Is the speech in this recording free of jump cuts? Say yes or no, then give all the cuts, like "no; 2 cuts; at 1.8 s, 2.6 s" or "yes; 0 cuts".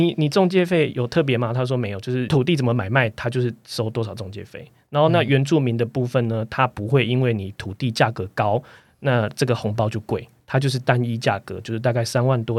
yes; 0 cuts